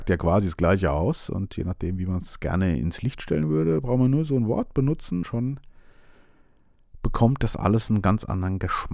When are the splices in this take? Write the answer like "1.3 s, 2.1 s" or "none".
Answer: 5.2 s